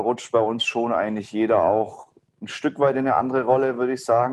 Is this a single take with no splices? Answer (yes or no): yes